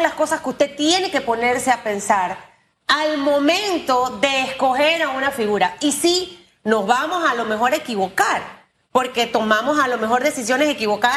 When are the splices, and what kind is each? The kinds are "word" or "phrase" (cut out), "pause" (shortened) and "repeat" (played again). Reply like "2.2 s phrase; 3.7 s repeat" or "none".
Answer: none